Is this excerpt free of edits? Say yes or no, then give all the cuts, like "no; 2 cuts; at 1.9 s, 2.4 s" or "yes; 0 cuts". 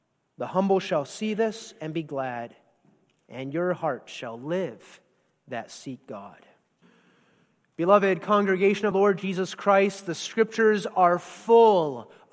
no; 2 cuts; at 6.8 s, 8.9 s